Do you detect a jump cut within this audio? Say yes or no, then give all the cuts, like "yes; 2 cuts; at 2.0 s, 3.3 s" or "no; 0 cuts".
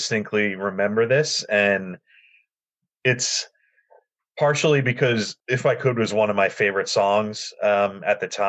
yes; 1 cut; at 5.4 s